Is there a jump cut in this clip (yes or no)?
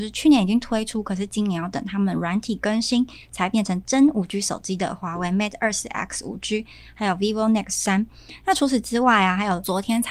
no